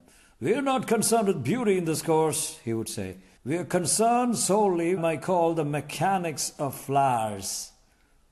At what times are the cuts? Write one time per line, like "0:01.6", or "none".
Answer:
0:03.4
0:05.0